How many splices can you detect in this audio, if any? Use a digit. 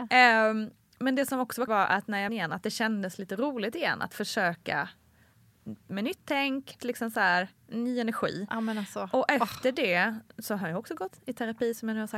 4